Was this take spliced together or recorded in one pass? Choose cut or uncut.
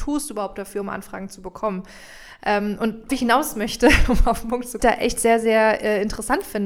cut